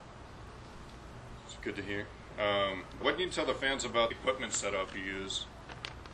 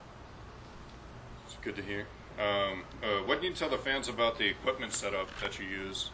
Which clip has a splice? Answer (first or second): first